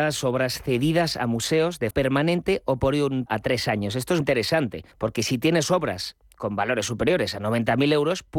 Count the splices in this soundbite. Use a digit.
4